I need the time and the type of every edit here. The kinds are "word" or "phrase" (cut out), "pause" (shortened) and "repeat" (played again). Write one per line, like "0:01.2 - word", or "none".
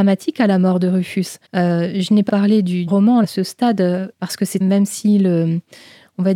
0:01.4 - pause
0:02.3 - word
0:02.9 - word
0:03.2 - word
0:04.1 - word
0:04.6 - phrase

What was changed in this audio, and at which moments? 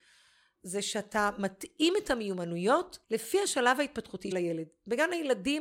0:03.0 - pause
0:04.3 - word

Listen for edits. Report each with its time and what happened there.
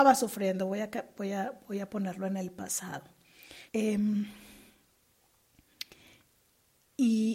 0:03.7 - pause

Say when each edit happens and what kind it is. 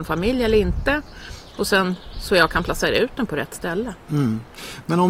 none

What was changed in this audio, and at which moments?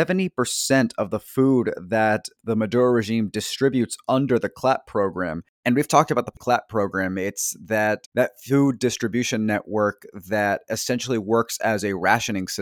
0:05.5 - pause
0:08.1 - word

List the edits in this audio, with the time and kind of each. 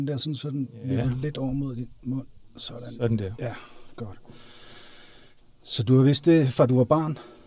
0:05.4 - pause

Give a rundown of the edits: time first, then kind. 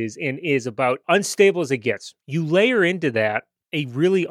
0:02.2 - pause

